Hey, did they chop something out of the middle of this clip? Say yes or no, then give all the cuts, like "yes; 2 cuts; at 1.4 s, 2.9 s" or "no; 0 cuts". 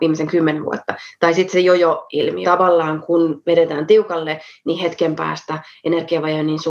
yes; 1 cut; at 2.4 s